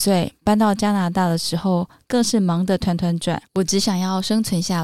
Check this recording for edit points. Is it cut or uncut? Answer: cut